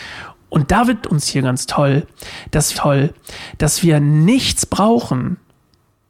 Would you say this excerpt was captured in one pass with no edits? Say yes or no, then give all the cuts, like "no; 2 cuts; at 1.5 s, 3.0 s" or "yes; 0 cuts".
no; 2 cuts; at 1.0 s, 2.7 s